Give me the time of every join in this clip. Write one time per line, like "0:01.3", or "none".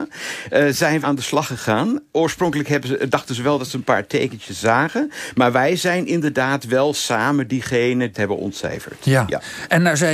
0:01.0
0:08.1